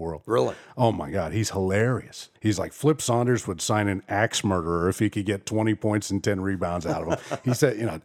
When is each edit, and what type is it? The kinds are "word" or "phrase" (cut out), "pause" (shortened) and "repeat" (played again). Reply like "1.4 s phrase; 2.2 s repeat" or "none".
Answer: 2.4 s pause